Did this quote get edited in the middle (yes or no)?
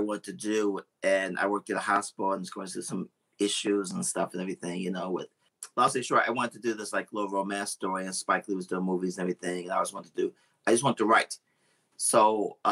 no